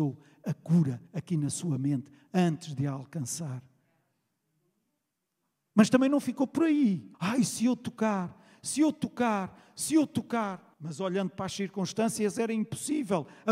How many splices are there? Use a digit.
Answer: 3